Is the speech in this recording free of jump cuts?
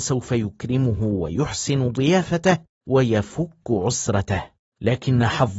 yes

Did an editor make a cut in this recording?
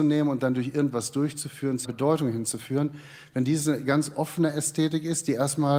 yes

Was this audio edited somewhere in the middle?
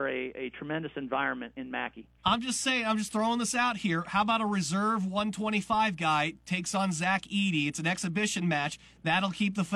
yes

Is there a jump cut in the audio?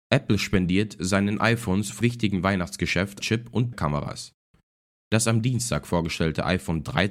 yes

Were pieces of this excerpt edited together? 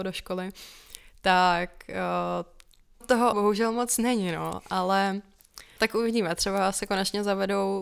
yes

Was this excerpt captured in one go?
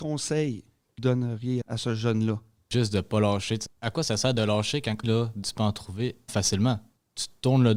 no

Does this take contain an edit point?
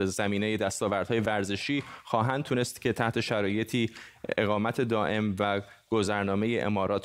no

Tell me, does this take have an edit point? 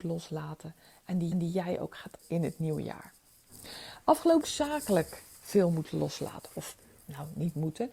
yes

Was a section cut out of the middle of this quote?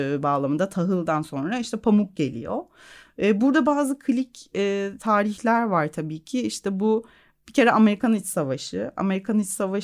no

